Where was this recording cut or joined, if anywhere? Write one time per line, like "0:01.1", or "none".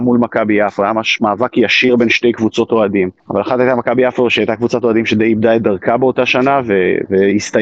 0:03.2

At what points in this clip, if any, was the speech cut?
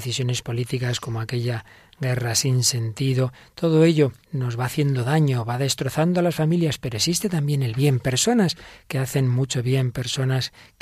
0:04.2

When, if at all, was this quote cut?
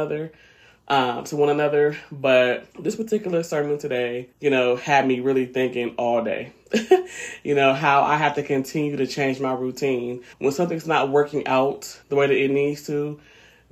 0:02.7
0:04.3
0:10.3
0:12.0

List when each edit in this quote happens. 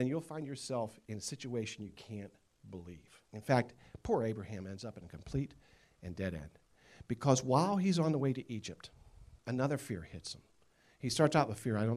0:03.2
0:09.4

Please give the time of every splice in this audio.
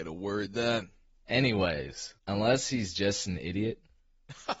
0:02.2

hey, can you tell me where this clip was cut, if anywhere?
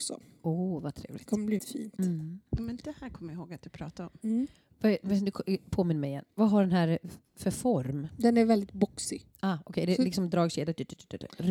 0:01.6

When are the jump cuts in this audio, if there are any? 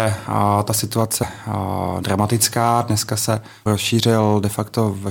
0:01.2
0:03.7

